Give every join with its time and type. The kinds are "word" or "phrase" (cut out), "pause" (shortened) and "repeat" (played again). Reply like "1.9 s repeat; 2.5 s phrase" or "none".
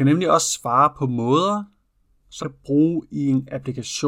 2.4 s word